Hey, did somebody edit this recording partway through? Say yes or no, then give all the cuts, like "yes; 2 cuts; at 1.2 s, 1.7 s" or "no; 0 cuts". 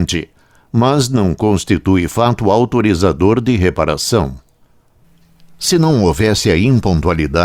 no; 0 cuts